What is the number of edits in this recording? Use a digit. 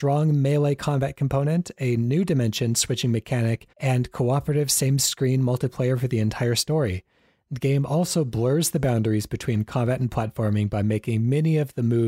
1